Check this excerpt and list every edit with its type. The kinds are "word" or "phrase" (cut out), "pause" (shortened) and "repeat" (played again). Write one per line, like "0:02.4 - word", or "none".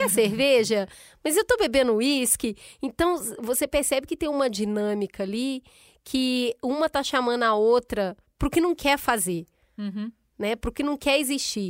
none